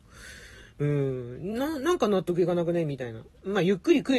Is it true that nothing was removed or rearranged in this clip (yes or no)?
yes